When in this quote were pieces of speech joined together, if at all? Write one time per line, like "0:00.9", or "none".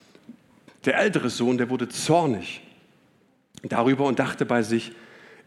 none